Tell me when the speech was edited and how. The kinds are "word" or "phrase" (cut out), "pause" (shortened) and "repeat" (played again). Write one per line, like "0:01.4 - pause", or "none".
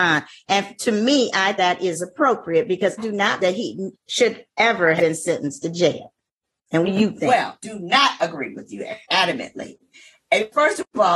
0:01.6 - word
0:03.0 - word
0:03.4 - word
0:05.0 - word
0:06.8 - word
0:07.6 - word
0:09.0 - word